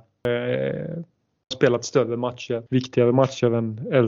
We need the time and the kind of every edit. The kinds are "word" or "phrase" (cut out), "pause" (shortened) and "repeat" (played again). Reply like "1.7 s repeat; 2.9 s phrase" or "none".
1.5 s word; 2.7 s pause